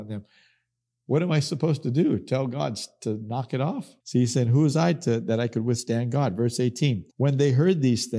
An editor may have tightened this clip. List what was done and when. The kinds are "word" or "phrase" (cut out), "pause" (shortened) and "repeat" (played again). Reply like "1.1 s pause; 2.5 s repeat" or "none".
4.0 s pause; 7.1 s pause